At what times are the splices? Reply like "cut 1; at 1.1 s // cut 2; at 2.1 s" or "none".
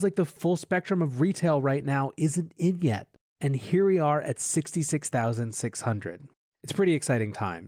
none